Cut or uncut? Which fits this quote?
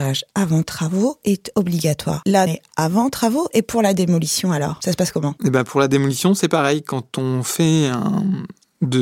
cut